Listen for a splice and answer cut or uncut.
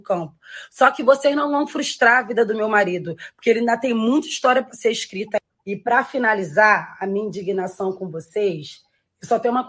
uncut